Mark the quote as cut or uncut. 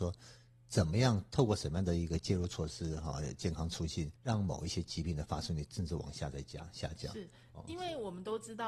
cut